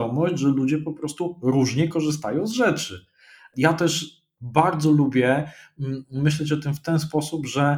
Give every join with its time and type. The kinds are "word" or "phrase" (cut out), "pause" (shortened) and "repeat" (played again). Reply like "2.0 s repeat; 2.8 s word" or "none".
none